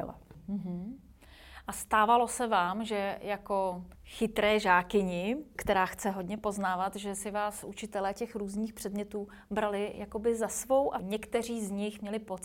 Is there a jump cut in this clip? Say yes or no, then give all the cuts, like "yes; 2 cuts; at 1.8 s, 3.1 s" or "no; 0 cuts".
yes; 1 cut; at 3.9 s